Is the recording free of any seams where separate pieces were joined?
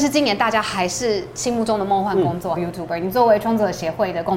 no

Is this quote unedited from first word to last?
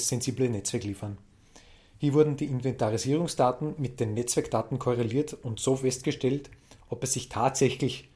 yes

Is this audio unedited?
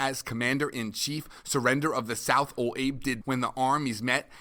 no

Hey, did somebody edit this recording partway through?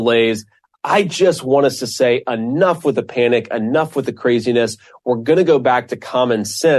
no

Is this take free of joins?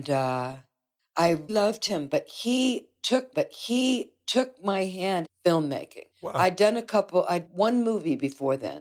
no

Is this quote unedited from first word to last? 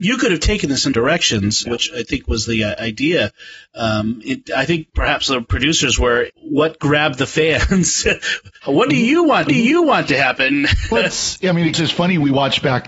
no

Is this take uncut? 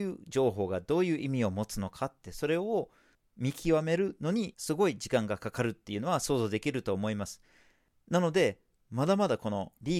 yes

